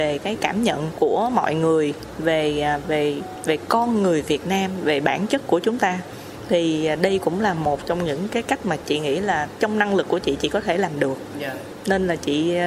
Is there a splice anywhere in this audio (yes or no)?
no